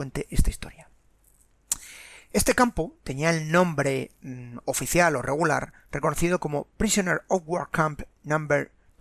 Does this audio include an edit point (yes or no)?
no